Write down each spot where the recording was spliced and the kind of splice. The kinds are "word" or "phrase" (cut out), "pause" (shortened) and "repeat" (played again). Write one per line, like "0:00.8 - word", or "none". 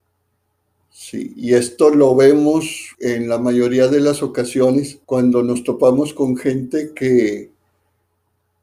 0:02.9 - pause
0:05.0 - pause